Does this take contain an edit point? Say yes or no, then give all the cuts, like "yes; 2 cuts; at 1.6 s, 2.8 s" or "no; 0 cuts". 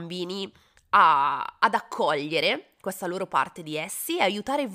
no; 0 cuts